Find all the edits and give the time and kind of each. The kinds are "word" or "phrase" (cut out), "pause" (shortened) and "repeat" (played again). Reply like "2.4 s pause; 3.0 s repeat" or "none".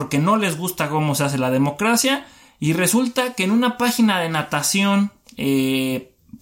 none